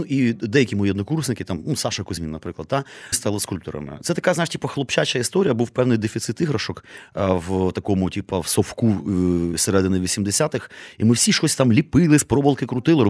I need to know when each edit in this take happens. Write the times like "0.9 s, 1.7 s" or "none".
3.1 s

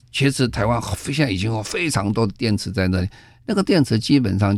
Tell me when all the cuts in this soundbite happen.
none

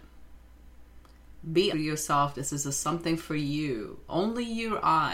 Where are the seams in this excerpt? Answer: 1.7 s

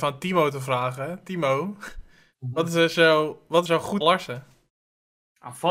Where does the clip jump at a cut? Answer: 3.7 s, 4.0 s

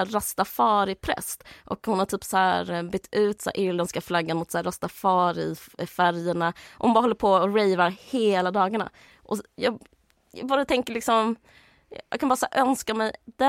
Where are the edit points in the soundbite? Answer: none

